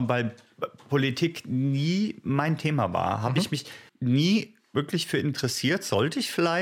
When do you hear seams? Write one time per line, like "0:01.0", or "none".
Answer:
0:03.9